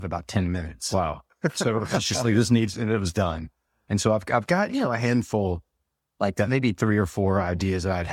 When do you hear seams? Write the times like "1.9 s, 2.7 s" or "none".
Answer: none